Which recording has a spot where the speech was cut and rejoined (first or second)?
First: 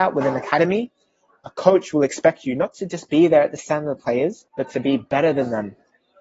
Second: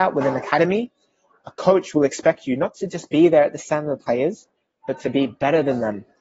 first